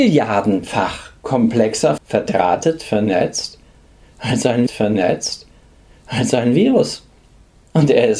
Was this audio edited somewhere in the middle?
yes; 2 cuts; at 2.0 s, 4.7 s

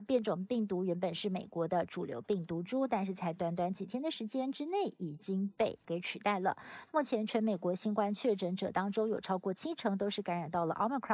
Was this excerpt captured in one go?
no; 1 cut; at 5.8 s

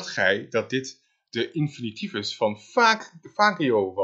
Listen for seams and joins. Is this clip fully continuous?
yes; 0 cuts

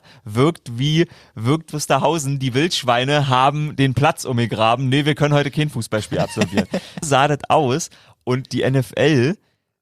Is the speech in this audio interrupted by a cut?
yes; 2 cuts; at 1.7 s, 7.0 s

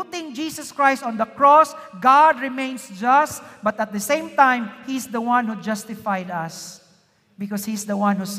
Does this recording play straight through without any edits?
yes; 0 cuts

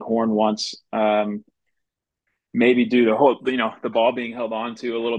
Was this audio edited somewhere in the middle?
no; 0 cuts

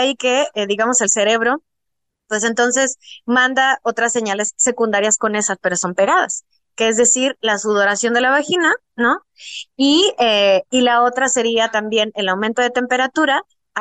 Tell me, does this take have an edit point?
no; 0 cuts

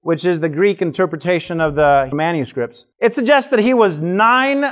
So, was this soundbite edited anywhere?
yes; 2 cuts; at 2.1 s, 2.9 s

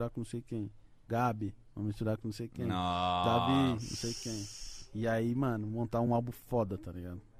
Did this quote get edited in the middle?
no; 0 cuts

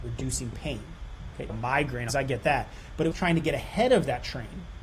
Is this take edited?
yes; 3 cuts; at 1.5 s, 2.1 s, 3.1 s

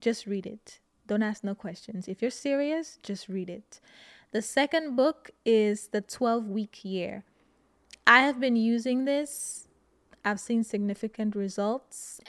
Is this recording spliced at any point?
no; 0 cuts

